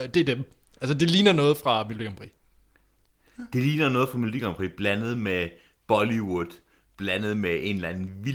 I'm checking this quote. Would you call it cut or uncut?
uncut